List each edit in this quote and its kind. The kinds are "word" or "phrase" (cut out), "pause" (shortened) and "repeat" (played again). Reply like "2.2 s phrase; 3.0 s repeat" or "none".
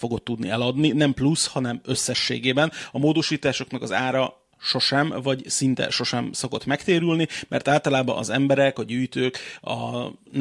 none